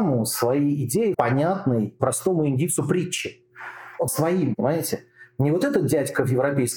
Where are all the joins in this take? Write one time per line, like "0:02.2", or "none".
0:01.1
0:04.1